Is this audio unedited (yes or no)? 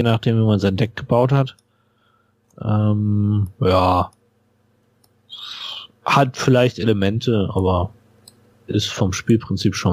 yes